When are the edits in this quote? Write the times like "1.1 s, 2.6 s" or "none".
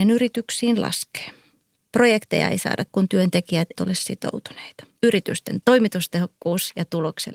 2.9 s, 3.7 s, 5.0 s